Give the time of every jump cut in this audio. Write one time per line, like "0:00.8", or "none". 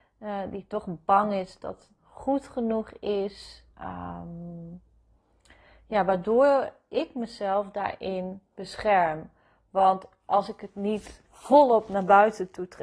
0:02.0
0:03.7
0:08.5
0:11.3